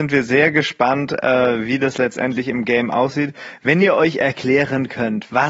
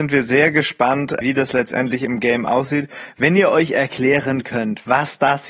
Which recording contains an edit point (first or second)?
second